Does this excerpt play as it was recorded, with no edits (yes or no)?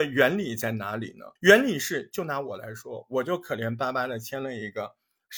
no